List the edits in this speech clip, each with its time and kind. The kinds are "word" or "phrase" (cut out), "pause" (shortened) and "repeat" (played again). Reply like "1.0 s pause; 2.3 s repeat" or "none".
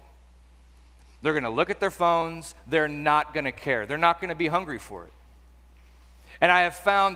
none